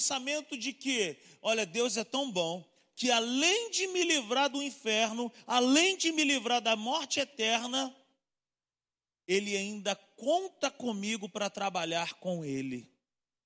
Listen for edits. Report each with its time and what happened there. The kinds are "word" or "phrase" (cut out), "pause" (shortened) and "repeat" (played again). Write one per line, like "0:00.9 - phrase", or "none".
none